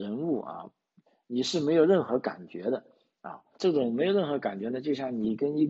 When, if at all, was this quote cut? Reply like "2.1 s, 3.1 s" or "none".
1.1 s, 3.6 s